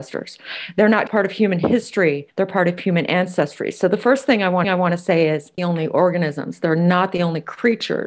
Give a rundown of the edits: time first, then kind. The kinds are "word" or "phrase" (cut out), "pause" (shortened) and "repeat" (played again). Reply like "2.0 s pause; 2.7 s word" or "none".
1.1 s word; 2.3 s pause; 4.6 s repeat; 5.6 s phrase